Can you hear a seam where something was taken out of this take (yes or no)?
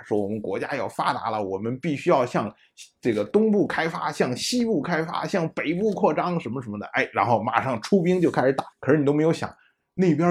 yes